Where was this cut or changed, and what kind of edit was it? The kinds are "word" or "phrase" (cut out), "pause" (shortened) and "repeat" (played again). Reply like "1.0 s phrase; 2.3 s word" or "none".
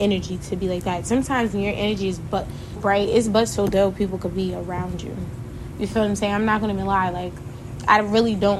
2.8 s word